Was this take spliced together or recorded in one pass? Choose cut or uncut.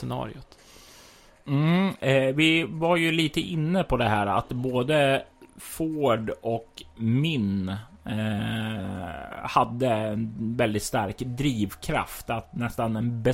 uncut